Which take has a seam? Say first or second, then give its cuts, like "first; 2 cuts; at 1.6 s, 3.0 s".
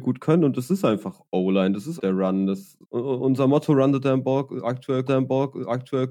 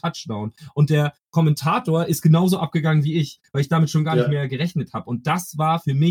first; 3 cuts; at 2.0 s, 2.8 s, 5.1 s